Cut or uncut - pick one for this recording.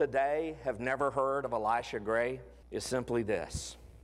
cut